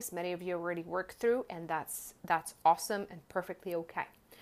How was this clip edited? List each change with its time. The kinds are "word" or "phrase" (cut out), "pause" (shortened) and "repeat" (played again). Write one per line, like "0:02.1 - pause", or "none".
none